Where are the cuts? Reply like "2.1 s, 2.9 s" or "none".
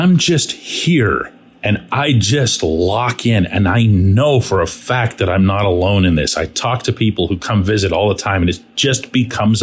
none